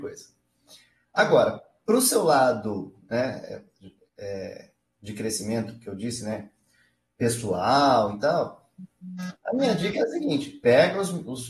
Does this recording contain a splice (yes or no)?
yes